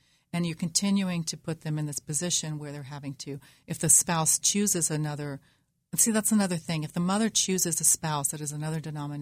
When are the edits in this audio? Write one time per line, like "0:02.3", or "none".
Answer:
none